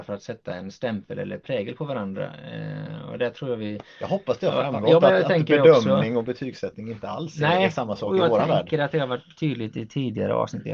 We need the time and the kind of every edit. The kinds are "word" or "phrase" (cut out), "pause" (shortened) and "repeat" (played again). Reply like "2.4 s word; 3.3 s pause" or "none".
none